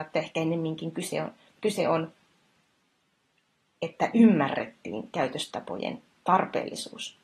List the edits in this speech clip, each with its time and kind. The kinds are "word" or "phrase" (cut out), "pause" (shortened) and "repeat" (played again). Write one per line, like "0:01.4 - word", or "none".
0:01.5 - word